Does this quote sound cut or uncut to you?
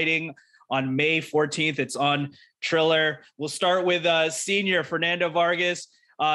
uncut